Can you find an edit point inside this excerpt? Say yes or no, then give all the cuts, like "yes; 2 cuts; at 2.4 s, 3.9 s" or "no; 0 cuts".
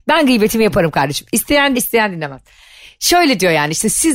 yes; 1 cut; at 1.7 s